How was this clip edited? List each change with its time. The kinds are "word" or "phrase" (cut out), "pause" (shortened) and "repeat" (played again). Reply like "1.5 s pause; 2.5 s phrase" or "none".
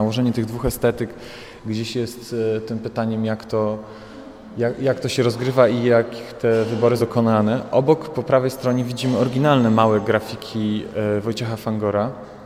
7.0 s word